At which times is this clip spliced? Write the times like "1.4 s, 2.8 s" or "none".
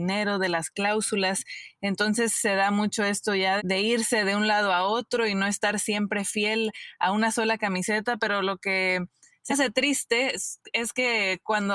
3.6 s, 9.5 s